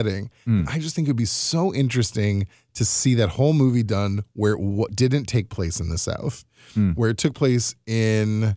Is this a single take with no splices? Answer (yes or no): yes